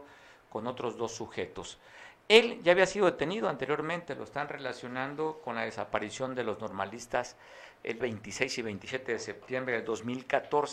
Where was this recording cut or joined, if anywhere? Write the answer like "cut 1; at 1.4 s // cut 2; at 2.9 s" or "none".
cut 1; at 8.0 s